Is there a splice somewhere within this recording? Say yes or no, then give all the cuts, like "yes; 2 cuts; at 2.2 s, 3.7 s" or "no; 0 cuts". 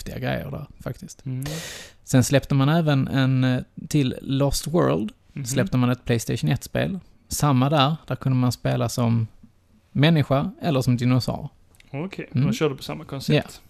no; 0 cuts